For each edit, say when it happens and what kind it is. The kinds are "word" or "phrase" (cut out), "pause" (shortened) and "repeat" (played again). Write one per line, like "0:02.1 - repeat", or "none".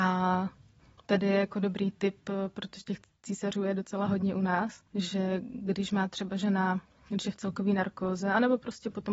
0:04.9 - pause